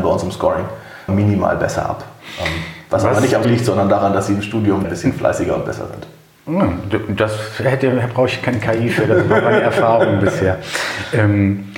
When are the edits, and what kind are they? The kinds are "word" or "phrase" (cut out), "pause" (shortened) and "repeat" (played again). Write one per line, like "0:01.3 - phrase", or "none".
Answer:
0:01.1 - word
0:03.4 - word
0:04.8 - word